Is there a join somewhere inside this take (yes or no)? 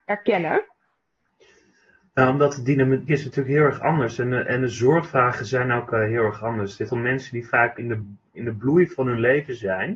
yes